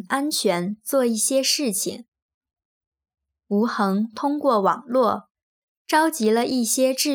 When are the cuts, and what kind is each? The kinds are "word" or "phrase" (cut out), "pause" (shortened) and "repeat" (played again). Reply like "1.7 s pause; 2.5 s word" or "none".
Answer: none